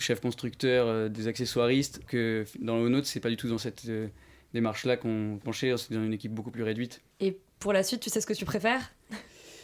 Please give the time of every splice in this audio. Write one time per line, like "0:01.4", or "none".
0:02.1
0:05.4
0:07.1